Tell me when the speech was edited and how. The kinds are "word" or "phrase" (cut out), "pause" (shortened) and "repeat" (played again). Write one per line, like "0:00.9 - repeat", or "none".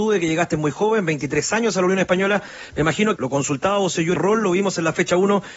0:03.2 - word
0:04.2 - word